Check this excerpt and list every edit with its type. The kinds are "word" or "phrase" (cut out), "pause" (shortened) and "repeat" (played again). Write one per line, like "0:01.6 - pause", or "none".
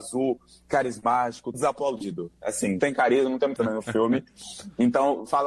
0:01.5 - word
0:02.8 - word
0:03.6 - word